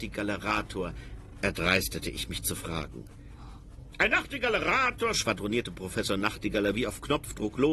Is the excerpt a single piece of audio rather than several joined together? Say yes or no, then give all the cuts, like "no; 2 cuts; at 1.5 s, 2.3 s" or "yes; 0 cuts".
yes; 0 cuts